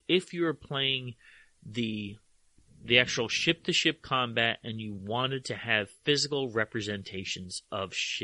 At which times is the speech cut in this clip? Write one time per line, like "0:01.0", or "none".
none